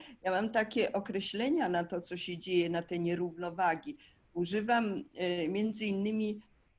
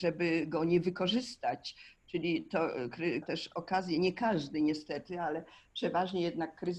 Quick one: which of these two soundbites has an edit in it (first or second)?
second